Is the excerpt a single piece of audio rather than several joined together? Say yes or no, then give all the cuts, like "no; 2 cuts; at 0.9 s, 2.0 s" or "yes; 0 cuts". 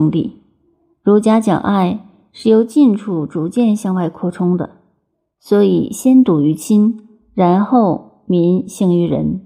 yes; 0 cuts